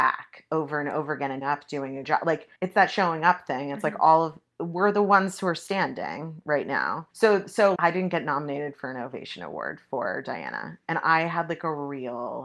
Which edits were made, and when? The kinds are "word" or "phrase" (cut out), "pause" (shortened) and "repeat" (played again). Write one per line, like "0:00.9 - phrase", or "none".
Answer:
0:01.4 - word
0:02.0 - word
0:02.6 - pause
0:07.1 - pause
0:07.8 - word